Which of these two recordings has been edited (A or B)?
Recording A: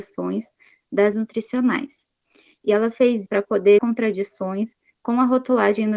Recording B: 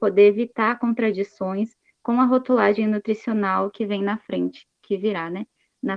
A